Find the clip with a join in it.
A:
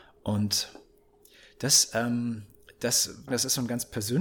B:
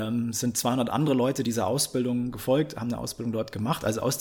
A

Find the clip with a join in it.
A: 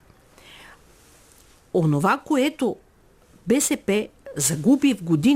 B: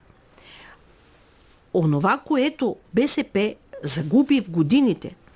B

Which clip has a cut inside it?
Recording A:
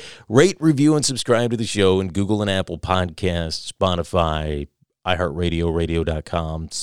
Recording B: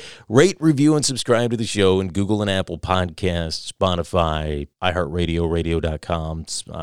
B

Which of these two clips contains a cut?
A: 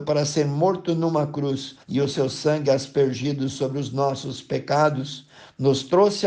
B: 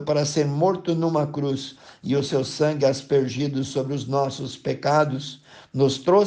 A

